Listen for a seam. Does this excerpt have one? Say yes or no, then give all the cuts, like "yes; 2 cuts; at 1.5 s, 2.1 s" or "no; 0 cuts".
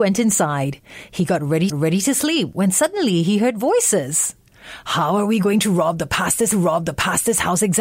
yes; 2 cuts; at 1.7 s, 6.5 s